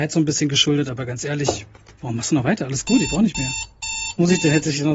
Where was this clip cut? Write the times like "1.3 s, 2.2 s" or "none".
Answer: none